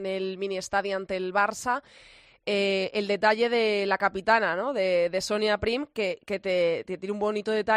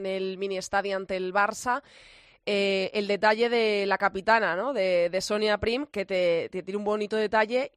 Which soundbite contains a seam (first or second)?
second